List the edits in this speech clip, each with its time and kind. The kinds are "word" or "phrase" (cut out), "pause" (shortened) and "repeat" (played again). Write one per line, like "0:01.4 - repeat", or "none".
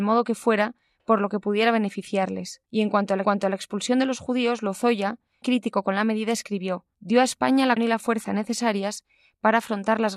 0:02.7 - pause
0:03.2 - repeat
0:05.4 - word
0:06.9 - pause
0:07.8 - word